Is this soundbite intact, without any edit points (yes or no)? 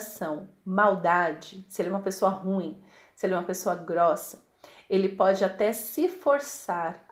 yes